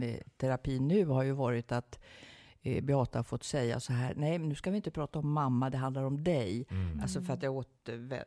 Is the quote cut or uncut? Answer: uncut